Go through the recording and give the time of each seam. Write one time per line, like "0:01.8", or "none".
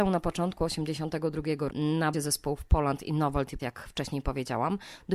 0:01.7
0:02.1
0:03.6